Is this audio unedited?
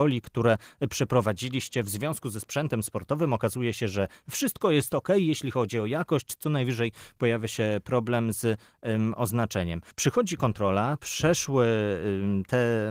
no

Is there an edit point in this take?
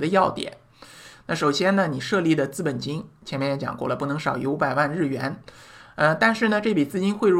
no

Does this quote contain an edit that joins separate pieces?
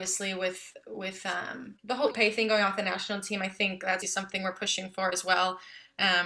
yes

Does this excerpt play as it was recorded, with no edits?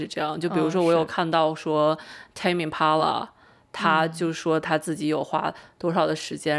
yes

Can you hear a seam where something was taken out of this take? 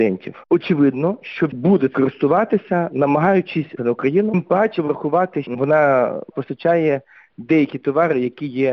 yes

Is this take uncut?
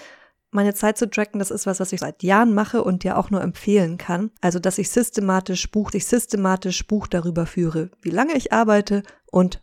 no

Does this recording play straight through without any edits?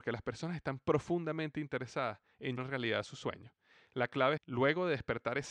no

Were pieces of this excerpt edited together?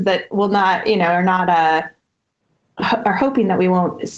no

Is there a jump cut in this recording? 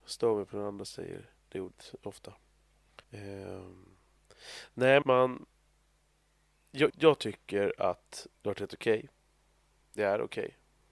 yes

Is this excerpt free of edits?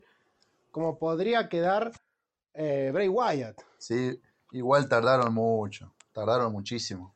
yes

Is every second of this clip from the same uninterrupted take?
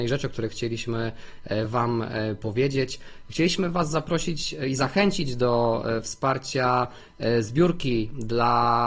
yes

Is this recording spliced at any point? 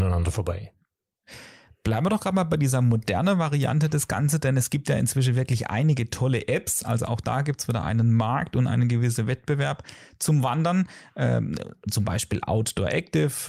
no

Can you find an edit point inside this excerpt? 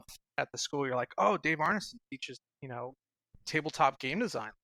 no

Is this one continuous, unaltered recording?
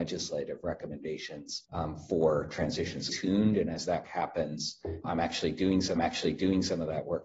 no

